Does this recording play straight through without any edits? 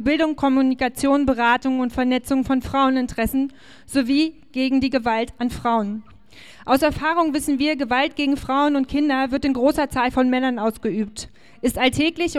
yes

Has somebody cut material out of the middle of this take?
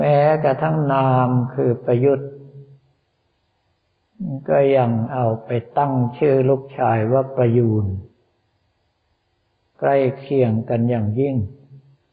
no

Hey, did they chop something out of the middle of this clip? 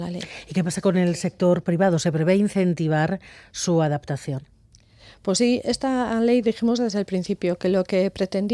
no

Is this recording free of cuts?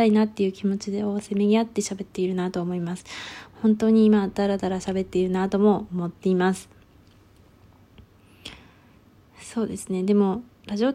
yes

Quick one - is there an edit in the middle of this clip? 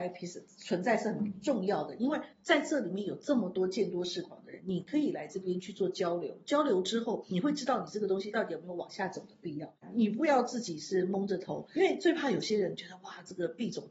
yes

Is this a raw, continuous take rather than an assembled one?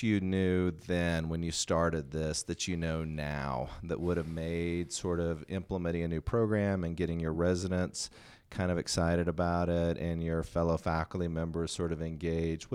yes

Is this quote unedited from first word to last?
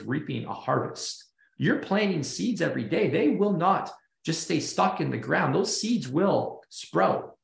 yes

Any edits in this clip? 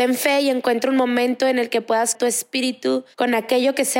yes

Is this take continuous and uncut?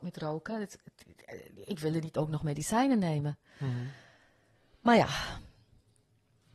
yes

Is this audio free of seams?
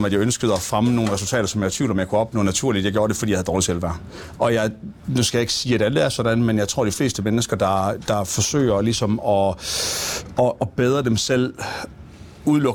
yes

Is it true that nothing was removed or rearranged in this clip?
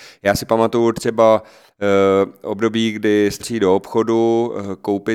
no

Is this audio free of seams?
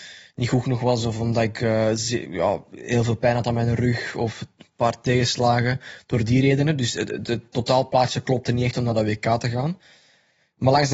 yes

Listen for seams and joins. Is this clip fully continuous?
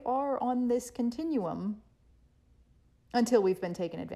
yes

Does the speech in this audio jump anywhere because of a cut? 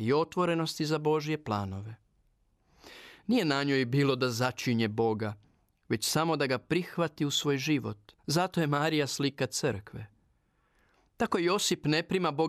yes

